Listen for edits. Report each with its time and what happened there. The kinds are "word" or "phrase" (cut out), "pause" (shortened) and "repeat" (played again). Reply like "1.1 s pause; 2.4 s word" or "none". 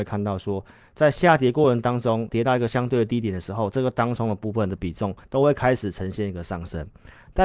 2.3 s word; 5.2 s pause